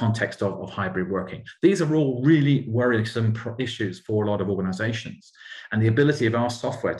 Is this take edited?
no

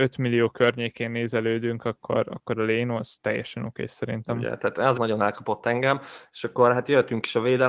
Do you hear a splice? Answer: yes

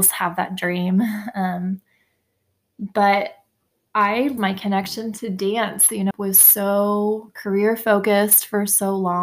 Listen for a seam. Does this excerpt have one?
yes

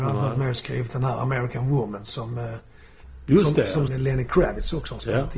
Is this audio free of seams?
no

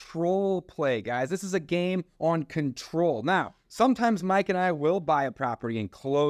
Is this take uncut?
no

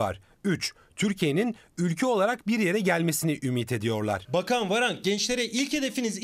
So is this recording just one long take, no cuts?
yes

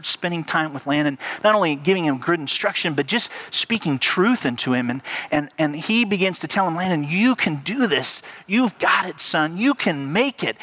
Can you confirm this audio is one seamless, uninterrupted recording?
yes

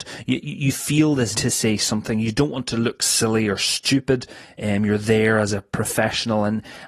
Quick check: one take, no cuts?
no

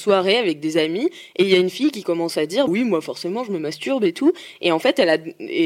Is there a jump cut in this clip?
yes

